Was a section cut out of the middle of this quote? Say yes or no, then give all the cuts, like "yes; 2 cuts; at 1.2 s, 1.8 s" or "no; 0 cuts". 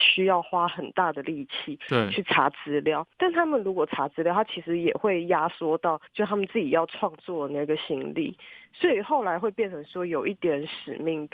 yes; 1 cut; at 6.1 s